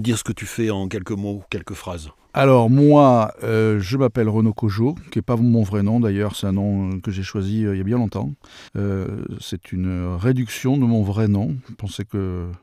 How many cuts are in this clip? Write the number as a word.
one